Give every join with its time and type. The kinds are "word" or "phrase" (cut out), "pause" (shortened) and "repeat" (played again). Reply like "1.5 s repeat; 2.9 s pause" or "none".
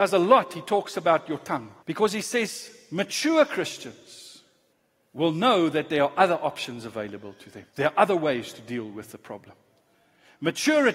1.8 s pause; 4.7 s pause; 7.7 s pause